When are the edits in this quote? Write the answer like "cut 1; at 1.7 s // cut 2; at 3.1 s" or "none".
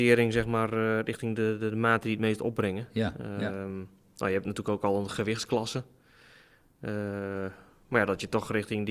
none